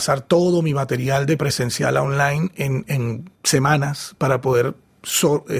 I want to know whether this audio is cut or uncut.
uncut